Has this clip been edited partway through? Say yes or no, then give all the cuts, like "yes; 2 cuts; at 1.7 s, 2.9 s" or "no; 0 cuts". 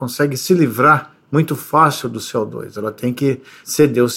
no; 0 cuts